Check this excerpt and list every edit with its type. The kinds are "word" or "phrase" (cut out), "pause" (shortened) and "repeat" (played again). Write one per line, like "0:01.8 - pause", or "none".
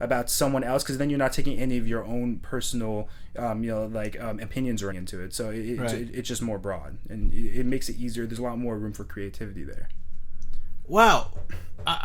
0:04.9 - word